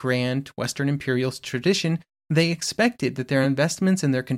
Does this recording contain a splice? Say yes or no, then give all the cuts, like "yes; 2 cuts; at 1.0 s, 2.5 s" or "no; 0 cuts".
no; 0 cuts